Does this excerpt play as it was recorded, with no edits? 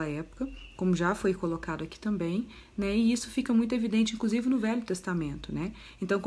yes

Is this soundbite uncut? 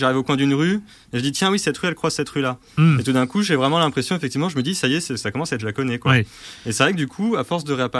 no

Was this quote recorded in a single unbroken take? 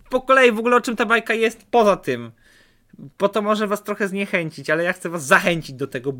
no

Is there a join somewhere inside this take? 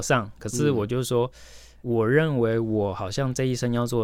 yes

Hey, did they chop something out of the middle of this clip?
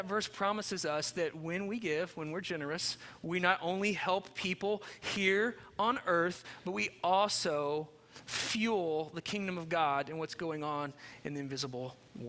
no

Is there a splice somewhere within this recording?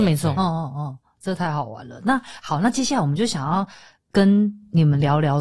no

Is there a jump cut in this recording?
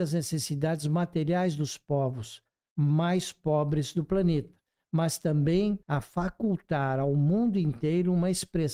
yes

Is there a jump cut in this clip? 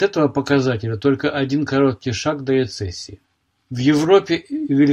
no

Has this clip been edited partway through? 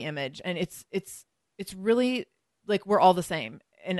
no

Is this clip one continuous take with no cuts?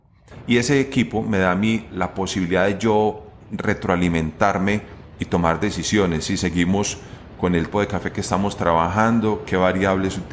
no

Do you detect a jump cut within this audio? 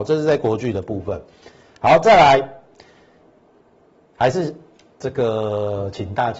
no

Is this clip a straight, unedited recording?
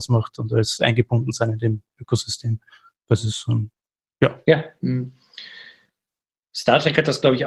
yes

